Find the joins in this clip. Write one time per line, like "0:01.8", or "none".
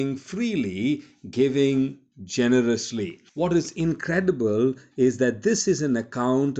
0:03.3